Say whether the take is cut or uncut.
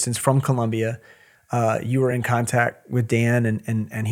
uncut